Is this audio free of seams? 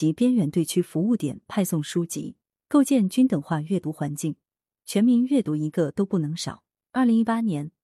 yes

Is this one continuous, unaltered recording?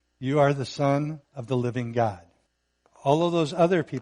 no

